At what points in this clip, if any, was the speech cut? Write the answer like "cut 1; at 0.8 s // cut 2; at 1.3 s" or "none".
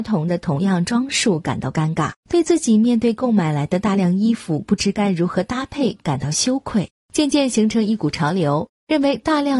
cut 1; at 2.2 s // cut 2; at 7.0 s